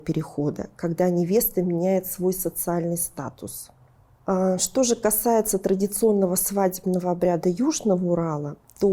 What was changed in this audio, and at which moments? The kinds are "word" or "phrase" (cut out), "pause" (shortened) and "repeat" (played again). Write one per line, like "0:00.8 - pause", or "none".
none